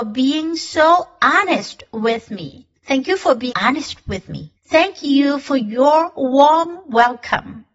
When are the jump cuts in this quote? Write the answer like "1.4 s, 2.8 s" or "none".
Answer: 2.8 s, 3.5 s, 4.6 s